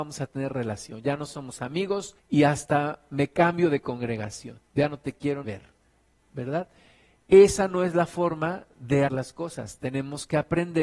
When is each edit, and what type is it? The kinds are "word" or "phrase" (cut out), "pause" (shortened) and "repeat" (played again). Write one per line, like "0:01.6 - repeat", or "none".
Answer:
0:02.2 - pause
0:04.7 - pause
0:05.4 - word
0:09.1 - word